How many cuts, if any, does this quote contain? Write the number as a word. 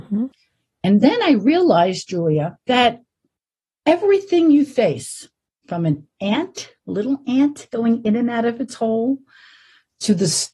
one